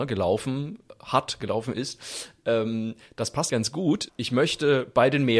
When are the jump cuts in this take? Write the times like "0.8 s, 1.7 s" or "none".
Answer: 3.5 s, 4.1 s